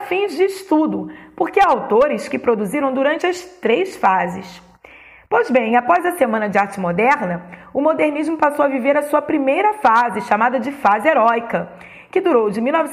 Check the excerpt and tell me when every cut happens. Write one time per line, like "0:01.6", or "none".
none

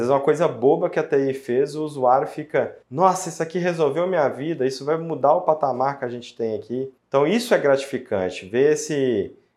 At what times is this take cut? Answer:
0:02.8
0:07.0

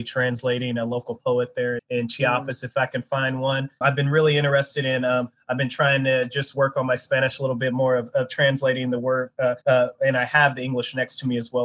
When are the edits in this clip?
0:01.8
0:03.8
0:09.6

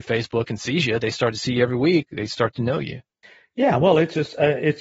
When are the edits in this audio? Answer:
0:03.2

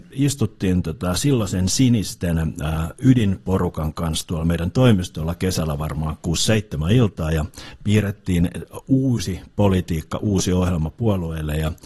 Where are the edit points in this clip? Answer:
none

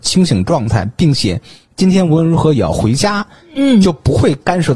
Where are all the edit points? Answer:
none

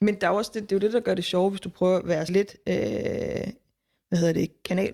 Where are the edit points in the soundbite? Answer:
0:02.3

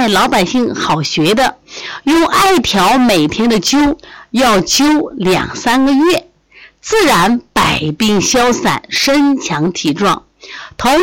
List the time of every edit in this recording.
none

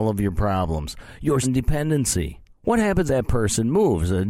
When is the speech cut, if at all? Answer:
0:01.4
0:02.5
0:03.1

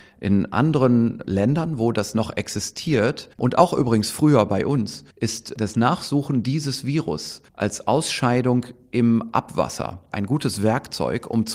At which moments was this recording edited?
0:03.3
0:05.1
0:07.5

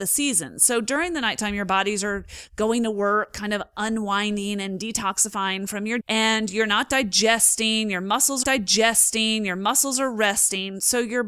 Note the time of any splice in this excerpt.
0:06.0
0:08.4

